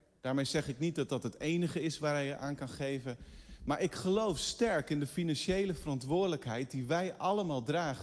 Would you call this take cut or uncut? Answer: uncut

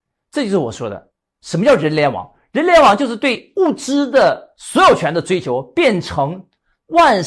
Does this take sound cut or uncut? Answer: uncut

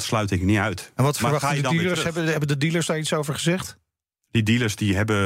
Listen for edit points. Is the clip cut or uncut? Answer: uncut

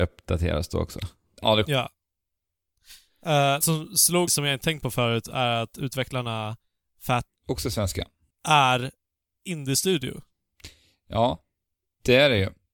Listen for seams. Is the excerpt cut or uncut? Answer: cut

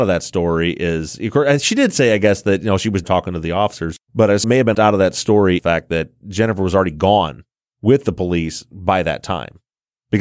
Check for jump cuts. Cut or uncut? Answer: cut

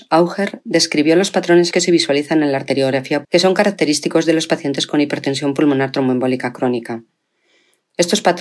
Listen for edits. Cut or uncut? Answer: cut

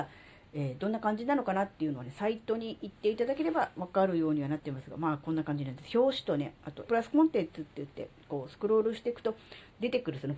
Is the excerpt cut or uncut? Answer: cut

